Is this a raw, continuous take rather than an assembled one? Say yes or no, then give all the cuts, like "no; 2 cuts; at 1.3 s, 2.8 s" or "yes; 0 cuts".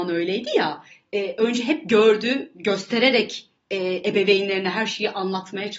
yes; 0 cuts